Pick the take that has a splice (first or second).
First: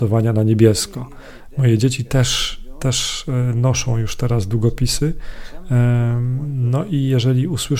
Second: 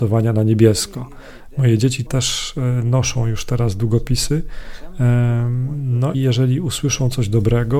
second